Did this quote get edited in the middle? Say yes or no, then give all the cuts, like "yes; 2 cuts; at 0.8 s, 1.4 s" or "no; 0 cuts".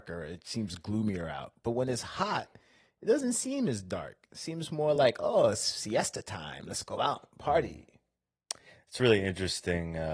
no; 0 cuts